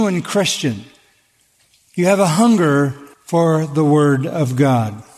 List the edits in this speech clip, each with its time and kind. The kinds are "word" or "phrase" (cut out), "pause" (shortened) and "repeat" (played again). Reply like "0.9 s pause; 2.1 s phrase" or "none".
3.1 s pause